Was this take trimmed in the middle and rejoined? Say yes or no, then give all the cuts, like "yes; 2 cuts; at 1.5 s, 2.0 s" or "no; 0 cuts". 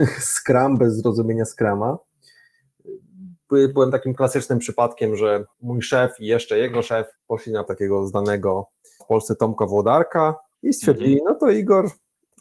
yes; 5 cuts; at 5.5 s, 7.1 s, 7.7 s, 9.0 s, 10.5 s